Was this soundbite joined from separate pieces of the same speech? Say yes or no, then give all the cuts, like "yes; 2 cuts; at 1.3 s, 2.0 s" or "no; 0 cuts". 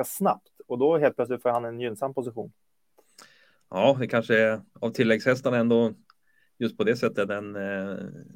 no; 0 cuts